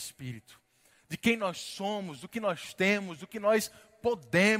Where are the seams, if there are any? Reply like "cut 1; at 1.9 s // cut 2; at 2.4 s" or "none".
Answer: none